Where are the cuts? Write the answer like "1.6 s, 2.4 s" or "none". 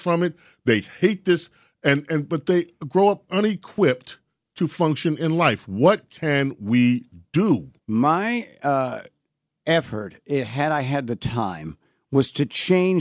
7.8 s